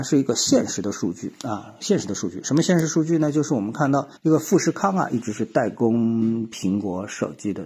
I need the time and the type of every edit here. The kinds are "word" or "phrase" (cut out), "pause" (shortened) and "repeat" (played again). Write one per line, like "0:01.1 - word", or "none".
0:04.2 - pause